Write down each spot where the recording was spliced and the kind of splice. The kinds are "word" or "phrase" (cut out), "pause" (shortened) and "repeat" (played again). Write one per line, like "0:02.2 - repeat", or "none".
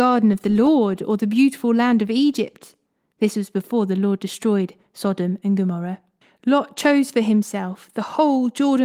0:06.2 - pause